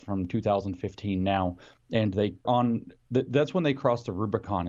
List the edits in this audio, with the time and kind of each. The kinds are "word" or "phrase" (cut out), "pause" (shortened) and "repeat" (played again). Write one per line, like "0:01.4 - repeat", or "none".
0:02.4 - word